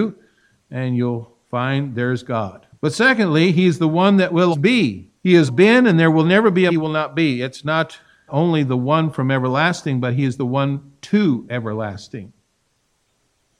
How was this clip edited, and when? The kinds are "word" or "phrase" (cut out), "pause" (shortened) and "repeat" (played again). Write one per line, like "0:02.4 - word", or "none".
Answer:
0:02.7 - pause
0:04.5 - word
0:05.2 - pause
0:05.5 - word
0:06.7 - phrase
0:08.3 - phrase

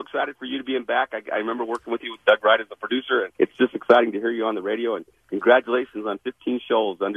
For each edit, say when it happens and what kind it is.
0:03.3 - pause

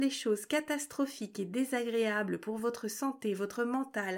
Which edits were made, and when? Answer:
none

